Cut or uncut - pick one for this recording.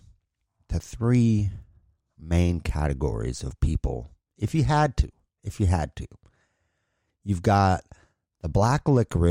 uncut